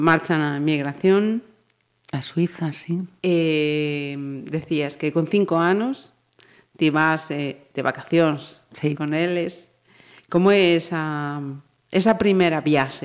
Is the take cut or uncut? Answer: uncut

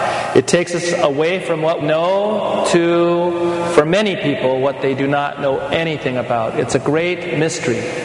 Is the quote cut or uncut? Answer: cut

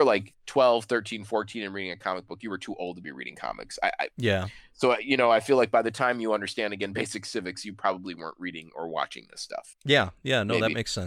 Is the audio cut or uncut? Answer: uncut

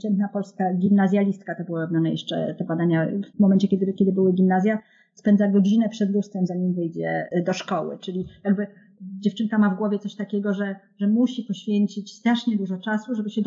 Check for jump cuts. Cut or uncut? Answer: uncut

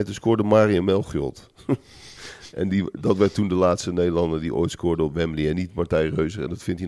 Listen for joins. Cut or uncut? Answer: uncut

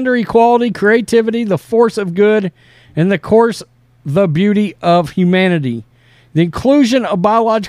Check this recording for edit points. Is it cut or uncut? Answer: uncut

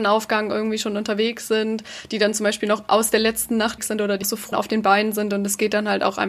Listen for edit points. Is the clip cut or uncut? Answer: cut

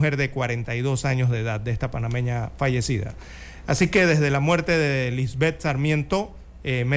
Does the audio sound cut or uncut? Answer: uncut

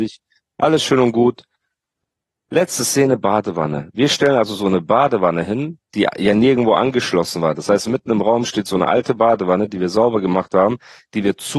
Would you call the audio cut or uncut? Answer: uncut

